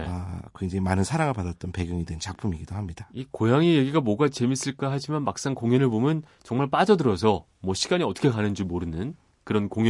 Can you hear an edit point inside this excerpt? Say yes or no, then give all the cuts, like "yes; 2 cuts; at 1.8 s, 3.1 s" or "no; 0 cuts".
no; 0 cuts